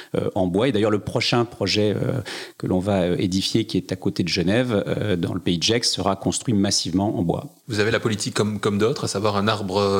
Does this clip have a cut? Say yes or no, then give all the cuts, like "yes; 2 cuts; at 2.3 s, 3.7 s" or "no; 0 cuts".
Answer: no; 0 cuts